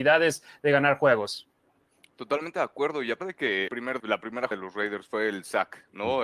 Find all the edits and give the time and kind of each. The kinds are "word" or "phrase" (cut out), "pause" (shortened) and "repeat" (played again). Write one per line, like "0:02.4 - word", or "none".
0:03.2 - word
0:03.7 - word
0:04.0 - word
0:04.5 - word